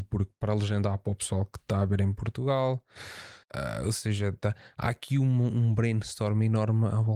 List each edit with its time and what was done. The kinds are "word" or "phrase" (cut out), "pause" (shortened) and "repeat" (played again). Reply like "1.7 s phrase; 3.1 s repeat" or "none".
3.4 s pause